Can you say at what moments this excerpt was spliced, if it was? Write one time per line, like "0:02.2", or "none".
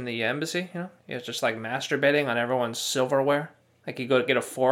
0:01.0
0:03.6